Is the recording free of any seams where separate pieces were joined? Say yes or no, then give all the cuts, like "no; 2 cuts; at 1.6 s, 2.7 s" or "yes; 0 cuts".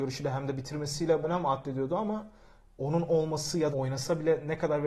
no; 2 cuts; at 1.2 s, 3.7 s